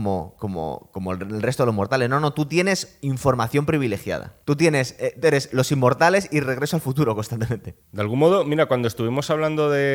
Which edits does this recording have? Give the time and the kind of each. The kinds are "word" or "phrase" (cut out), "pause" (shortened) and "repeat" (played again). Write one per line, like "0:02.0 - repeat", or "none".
0:04.4 - pause
0:07.8 - pause